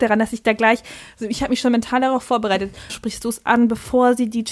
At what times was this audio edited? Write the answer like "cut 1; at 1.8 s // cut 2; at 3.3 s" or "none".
cut 1; at 2.9 s